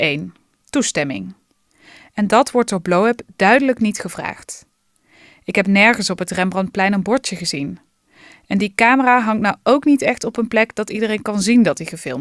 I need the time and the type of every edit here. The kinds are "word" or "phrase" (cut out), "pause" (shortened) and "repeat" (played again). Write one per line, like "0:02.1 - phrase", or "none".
none